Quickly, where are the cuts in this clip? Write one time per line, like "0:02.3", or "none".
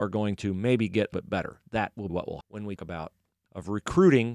0:01.1
0:02.1
0:02.4
0:02.8
0:03.5